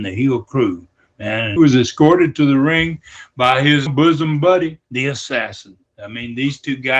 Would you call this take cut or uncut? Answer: cut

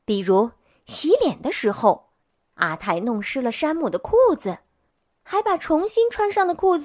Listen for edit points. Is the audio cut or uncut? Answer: uncut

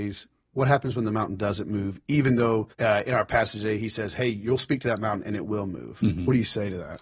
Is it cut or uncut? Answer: cut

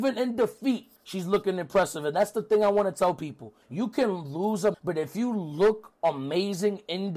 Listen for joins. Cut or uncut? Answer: cut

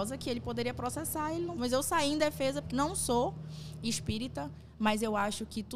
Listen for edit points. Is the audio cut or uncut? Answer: cut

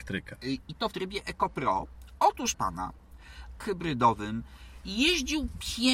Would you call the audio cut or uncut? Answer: cut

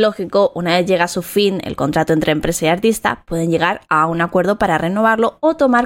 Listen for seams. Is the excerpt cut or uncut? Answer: uncut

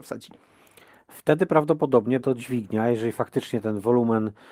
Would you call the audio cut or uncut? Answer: cut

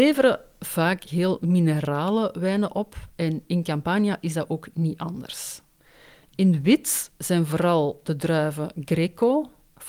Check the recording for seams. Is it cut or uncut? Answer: uncut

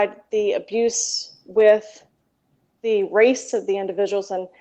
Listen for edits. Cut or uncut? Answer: uncut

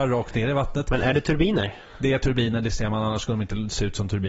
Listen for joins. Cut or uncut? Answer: uncut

